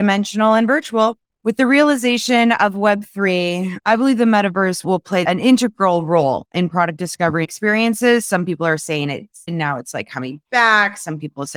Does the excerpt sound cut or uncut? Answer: cut